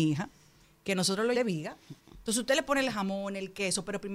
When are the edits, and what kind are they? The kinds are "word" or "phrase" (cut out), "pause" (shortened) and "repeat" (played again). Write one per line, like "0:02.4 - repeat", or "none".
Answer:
0:01.3 - phrase